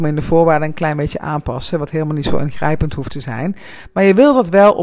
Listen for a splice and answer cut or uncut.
uncut